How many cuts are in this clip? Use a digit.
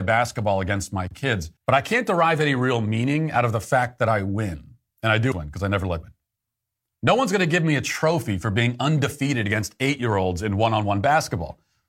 4